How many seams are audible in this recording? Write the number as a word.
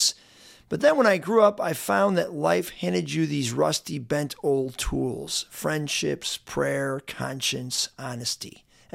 zero